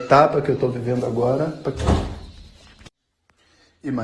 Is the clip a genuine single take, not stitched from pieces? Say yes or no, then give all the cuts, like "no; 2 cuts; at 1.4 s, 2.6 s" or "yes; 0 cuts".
no; 1 cut; at 1.6 s